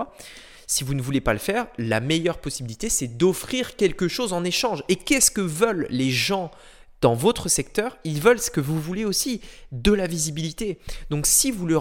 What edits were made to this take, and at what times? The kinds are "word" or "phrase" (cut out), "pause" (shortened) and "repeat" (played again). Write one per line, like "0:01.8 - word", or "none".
none